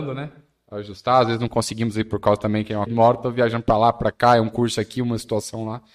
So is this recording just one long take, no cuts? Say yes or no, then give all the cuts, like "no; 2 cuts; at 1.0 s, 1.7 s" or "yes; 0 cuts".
no; 1 cut; at 2.9 s